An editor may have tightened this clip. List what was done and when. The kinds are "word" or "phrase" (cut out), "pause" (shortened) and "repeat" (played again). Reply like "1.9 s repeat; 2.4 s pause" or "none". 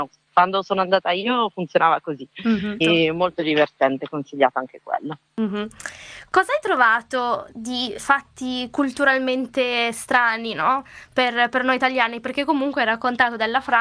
2.8 s word; 8.0 s word